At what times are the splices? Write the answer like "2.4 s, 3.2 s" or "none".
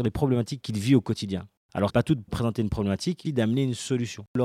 1.9 s, 2.3 s, 3.2 s